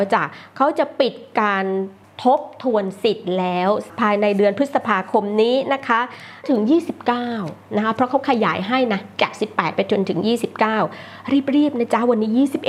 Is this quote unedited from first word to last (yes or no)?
yes